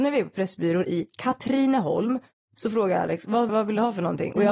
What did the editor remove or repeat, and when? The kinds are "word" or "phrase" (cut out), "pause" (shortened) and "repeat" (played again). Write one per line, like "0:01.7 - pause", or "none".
0:03.5 - word